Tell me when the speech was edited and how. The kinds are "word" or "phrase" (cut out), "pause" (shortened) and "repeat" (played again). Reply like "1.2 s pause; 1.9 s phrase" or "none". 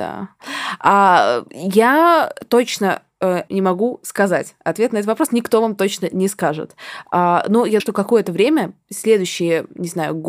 1.5 s pause; 3.5 s word; 7.8 s word